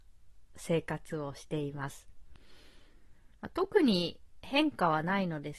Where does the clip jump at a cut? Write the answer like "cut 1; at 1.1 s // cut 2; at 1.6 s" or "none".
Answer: cut 1; at 3.3 s